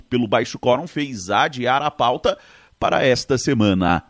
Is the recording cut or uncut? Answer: uncut